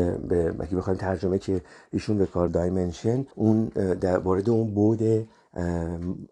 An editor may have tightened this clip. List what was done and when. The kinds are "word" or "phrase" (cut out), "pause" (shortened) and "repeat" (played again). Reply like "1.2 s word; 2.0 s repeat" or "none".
1.4 s word; 2.5 s phrase; 3.3 s pause